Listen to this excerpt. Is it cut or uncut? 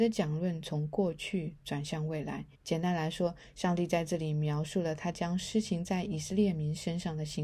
cut